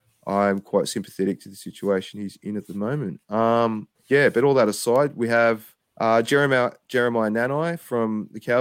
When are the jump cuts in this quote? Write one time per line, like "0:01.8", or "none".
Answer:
0:03.9
0:05.8